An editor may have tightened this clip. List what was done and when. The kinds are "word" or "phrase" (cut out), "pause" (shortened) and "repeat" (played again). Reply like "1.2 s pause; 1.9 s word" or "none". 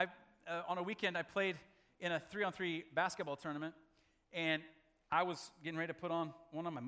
none